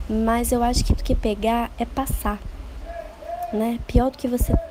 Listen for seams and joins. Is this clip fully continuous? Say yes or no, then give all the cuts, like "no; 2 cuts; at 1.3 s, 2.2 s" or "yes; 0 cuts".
no; 1 cut; at 1.0 s